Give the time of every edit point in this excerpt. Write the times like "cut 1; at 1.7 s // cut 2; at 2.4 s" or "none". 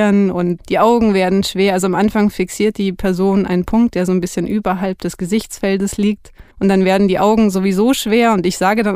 cut 1; at 6.5 s